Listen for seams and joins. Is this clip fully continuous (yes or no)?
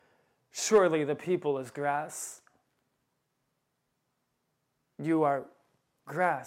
yes